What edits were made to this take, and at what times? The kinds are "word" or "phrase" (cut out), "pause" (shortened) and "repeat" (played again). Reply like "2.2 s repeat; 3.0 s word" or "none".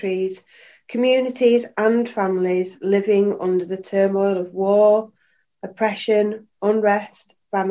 none